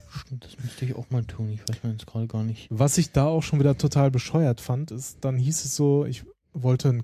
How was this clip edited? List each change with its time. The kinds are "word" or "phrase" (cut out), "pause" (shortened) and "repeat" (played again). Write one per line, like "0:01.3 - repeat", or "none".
none